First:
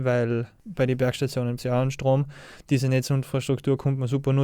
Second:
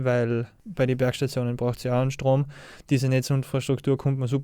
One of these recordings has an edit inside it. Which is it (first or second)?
first